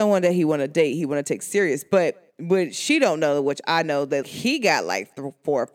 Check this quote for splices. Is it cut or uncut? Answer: cut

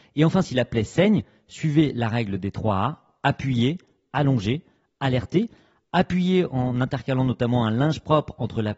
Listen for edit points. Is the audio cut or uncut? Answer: uncut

